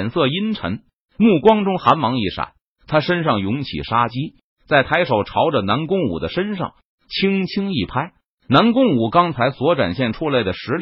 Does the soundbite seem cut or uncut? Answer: uncut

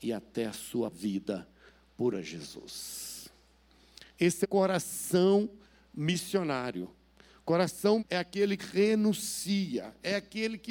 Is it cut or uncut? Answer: cut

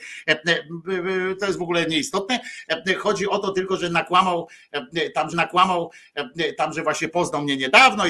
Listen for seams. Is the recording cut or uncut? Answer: cut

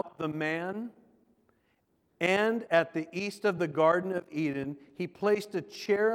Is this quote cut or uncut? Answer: uncut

